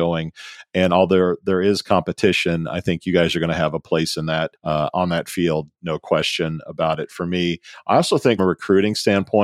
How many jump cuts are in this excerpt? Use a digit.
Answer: 1